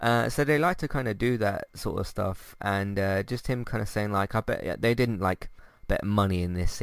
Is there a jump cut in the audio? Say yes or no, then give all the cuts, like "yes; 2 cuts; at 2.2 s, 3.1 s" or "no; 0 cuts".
no; 0 cuts